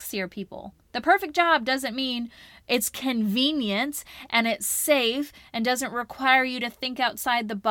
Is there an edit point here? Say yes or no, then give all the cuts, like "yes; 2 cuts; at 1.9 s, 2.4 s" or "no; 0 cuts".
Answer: no; 0 cuts